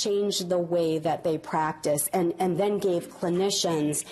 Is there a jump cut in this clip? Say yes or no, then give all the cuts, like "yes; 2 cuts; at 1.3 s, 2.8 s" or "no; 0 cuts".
no; 0 cuts